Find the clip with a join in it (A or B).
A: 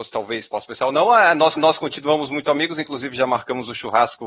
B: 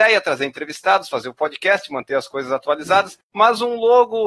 A